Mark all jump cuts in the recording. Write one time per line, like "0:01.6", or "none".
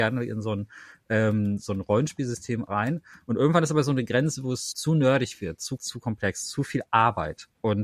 0:04.7
0:05.8